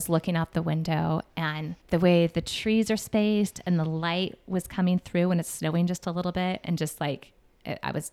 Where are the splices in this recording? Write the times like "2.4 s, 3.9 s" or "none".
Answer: 1.8 s